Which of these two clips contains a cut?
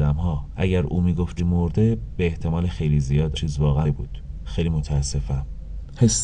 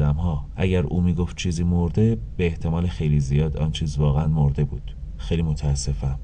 first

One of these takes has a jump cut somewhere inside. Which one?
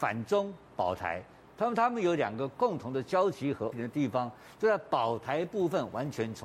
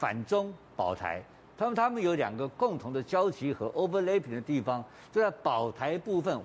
first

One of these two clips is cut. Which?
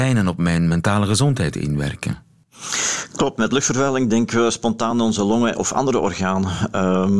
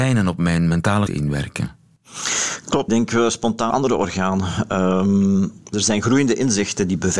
second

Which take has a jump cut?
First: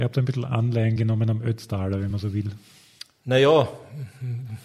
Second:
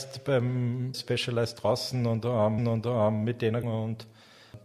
second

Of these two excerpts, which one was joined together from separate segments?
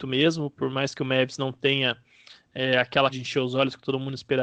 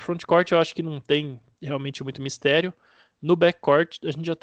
first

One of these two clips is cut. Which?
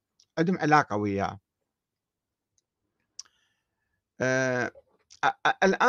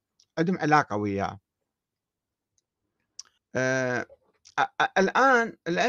second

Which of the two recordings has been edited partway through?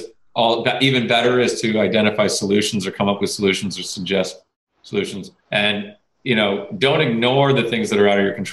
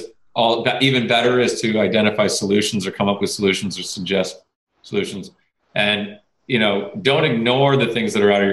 first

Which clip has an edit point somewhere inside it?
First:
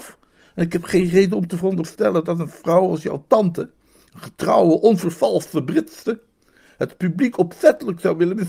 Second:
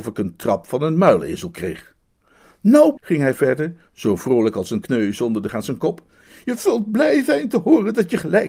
second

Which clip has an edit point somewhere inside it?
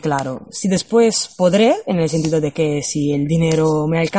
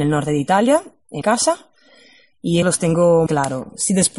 second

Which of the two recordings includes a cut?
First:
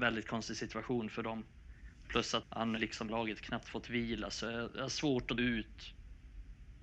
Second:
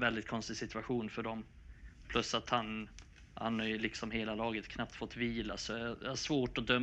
first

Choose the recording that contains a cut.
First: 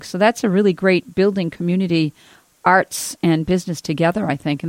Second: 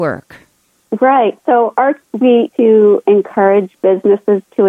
second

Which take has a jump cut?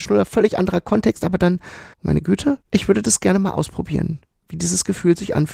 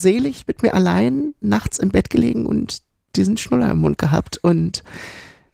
first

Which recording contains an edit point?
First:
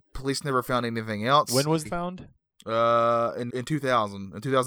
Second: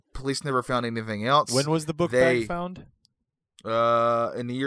first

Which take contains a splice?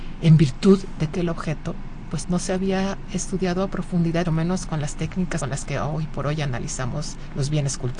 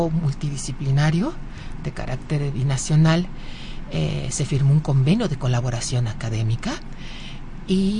first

